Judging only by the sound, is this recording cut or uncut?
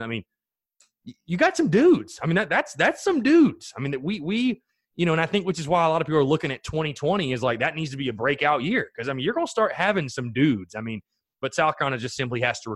uncut